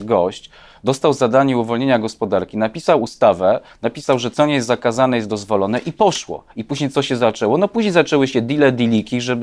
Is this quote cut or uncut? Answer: uncut